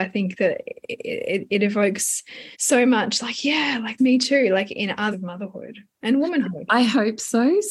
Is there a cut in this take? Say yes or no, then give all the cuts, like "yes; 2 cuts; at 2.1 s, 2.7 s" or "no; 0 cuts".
yes; 3 cuts; at 2.5 s, 4.0 s, 5.1 s